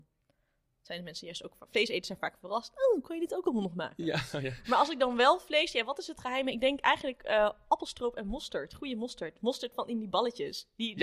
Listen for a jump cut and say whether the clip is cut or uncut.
uncut